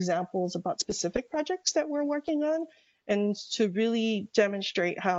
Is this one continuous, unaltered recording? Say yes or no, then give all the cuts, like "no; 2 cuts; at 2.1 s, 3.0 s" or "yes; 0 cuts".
yes; 0 cuts